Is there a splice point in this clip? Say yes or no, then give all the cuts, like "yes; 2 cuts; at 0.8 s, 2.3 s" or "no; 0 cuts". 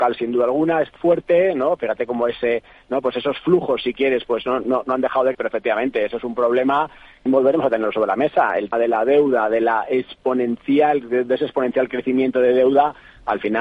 yes; 4 cuts; at 1.0 s, 5.3 s, 7.3 s, 8.7 s